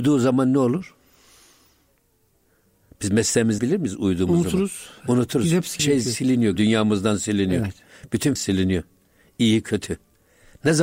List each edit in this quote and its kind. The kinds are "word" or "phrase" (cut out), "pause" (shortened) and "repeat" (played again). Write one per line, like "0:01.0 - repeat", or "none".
0:03.6 - word
0:05.8 - word
0:06.6 - word
0:08.4 - word

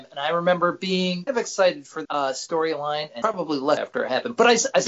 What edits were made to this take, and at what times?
0:01.3 - word
0:02.0 - word
0:03.2 - word
0:03.8 - word

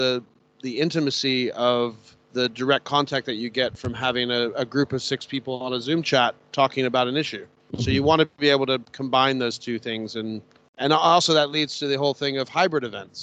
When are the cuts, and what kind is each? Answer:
0:02.2 - pause
0:07.6 - pause
0:10.6 - pause

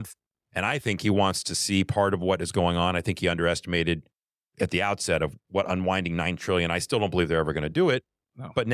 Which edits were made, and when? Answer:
none

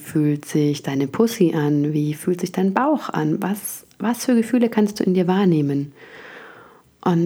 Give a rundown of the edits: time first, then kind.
none

